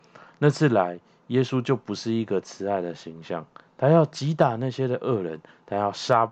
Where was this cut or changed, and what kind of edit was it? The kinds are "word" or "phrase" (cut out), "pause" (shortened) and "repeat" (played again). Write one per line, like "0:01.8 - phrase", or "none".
none